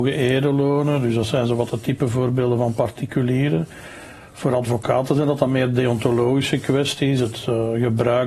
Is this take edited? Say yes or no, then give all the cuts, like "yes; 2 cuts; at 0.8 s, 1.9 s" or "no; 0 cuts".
no; 0 cuts